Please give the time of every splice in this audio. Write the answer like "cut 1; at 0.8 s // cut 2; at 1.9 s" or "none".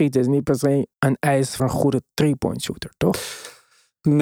cut 1; at 0.9 s // cut 2; at 1.6 s